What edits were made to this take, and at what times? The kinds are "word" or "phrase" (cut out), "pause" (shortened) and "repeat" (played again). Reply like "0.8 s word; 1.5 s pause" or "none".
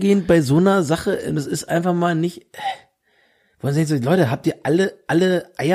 none